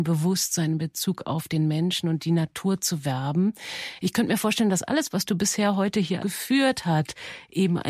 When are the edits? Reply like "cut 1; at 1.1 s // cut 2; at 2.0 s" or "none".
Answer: cut 1; at 6.2 s